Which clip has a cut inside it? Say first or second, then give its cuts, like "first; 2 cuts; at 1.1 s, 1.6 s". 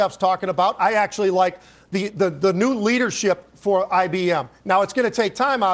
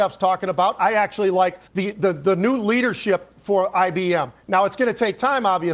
second; 1 cut; at 1.7 s